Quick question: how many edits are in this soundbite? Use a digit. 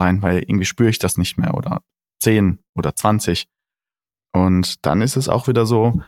0